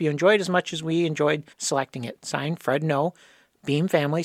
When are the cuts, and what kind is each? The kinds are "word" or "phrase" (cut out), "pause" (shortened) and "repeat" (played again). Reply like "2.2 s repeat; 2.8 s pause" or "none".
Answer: 1.5 s pause